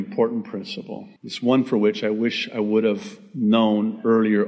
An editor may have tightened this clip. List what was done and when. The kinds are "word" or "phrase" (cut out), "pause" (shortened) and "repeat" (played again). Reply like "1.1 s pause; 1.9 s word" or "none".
1.2 s pause